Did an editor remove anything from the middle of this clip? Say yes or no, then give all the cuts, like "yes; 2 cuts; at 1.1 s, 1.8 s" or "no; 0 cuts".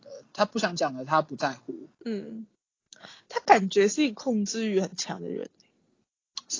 yes; 1 cut; at 1.9 s